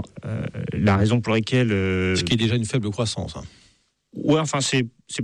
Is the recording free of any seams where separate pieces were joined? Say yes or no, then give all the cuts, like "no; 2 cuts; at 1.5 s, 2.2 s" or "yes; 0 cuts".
yes; 0 cuts